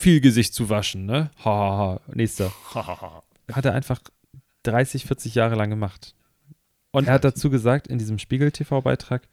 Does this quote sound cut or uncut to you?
cut